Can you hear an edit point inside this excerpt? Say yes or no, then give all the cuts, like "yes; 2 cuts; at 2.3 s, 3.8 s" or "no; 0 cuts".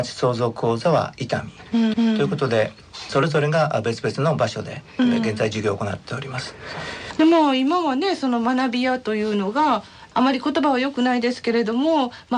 yes; 1 cut; at 1.9 s